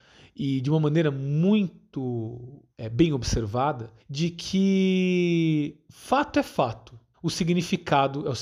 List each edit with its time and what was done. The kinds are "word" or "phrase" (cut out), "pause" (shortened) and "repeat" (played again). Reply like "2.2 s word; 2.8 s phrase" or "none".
2.7 s pause; 4.0 s pause; 7.1 s pause